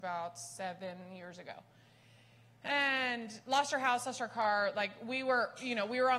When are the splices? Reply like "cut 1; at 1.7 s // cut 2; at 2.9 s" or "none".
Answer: none